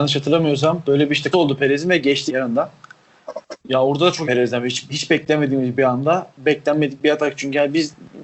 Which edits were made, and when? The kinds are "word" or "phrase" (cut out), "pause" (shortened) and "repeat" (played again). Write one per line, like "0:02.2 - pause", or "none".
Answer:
0:01.3 - word
0:02.3 - word
0:03.6 - pause
0:04.2 - word
0:04.9 - word